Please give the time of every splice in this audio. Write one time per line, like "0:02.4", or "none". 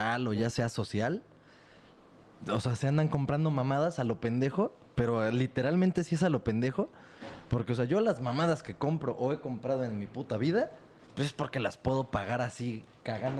none